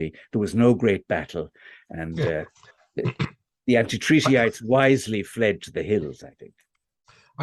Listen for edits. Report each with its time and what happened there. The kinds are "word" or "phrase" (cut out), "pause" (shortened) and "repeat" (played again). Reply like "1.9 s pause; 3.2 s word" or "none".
none